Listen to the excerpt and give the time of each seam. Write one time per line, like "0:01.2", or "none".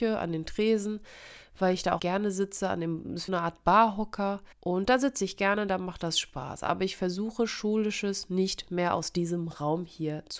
0:02.0
0:03.3
0:04.5